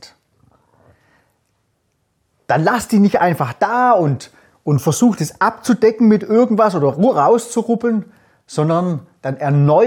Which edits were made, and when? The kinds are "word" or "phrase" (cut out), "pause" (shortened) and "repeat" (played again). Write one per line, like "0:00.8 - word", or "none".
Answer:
none